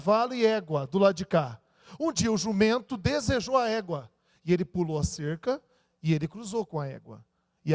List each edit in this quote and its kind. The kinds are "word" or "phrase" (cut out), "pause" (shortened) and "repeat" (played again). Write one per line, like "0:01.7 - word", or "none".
none